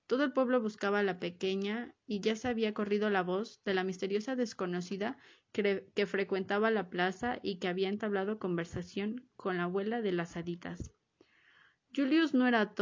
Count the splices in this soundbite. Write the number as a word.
zero